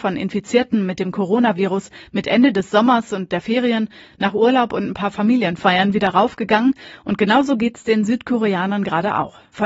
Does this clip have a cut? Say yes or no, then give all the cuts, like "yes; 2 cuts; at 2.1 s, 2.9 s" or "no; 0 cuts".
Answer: no; 0 cuts